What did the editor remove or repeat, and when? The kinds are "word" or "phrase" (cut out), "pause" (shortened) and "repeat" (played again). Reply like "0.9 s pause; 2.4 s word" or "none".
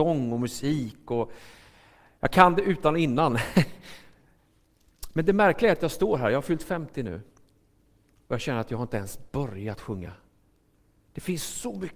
none

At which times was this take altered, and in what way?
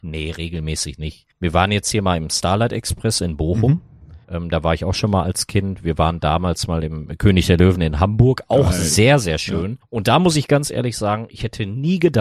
1.3 s pause; 4.2 s pause; 9.8 s pause

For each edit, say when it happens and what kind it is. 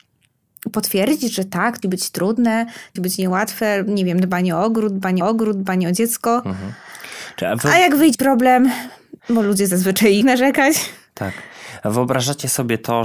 1.8 s word; 3.0 s word; 5.2 s repeat; 8.1 s word; 9.2 s pause; 10.2 s word

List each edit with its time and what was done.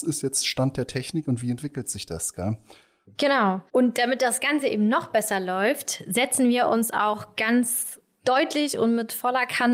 none

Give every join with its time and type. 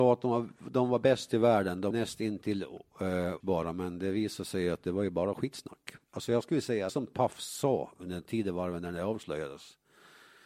1.9 s word; 3.4 s word; 6.9 s phrase

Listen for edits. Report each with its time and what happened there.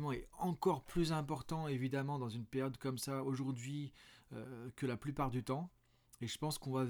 none

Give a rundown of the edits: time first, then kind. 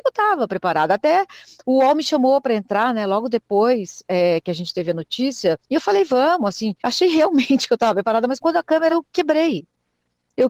5.6 s pause; 6.8 s pause; 8.4 s word; 8.9 s word

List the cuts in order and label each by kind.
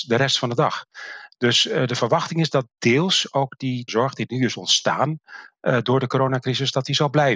3.9 s word

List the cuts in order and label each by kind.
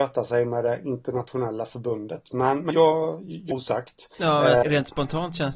2.7 s word; 3.5 s phrase; 4.1 s pause; 4.6 s word

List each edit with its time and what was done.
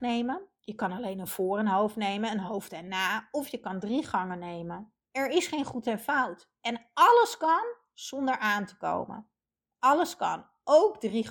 none

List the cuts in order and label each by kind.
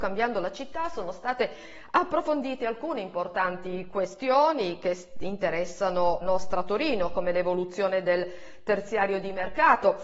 6.2 s word

